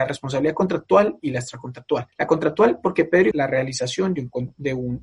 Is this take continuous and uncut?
no; 2 cuts; at 2.1 s, 3.3 s

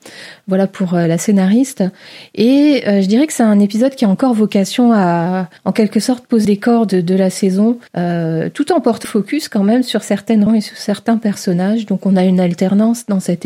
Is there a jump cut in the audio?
yes; 5 cuts; at 5.6 s, 6.4 s, 7.9 s, 9.0 s, 10.5 s

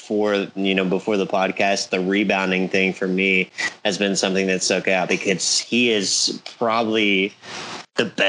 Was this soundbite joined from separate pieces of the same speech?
no; 0 cuts

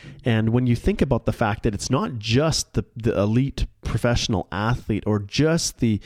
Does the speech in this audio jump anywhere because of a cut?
no; 0 cuts

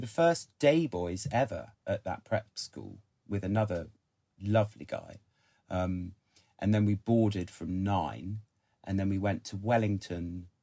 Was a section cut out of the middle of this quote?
no; 0 cuts

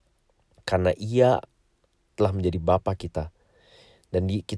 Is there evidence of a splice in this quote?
no; 0 cuts

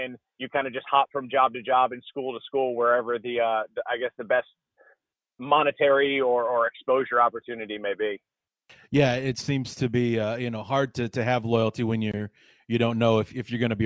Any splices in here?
no; 0 cuts

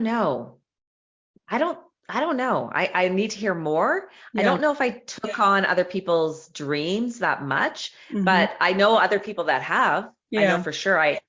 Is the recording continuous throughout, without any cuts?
yes; 0 cuts

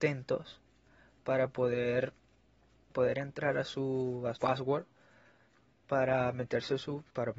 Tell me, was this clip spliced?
yes; 2 cuts; at 2.9 s, 4.3 s

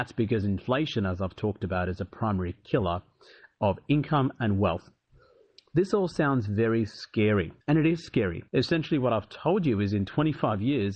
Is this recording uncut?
no; 2 cuts; at 7.6 s, 8.5 s

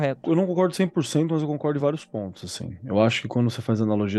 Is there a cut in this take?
no; 0 cuts

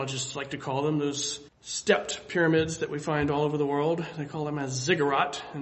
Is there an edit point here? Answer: yes; 1 cut; at 1.5 s

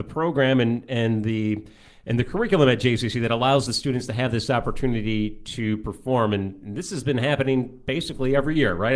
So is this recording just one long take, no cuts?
yes; 0 cuts

